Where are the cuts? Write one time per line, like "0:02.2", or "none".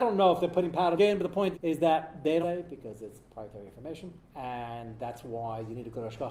0:01.0
0:01.5
0:02.4
0:04.2